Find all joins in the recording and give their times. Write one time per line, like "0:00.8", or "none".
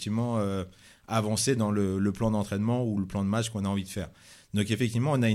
none